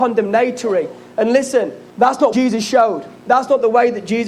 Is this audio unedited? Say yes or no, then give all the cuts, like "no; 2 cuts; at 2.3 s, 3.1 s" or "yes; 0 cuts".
no; 3 cuts; at 1.9 s, 2.3 s, 3.2 s